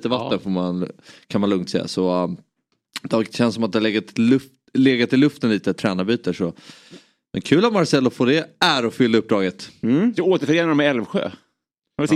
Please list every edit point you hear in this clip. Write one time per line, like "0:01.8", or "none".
none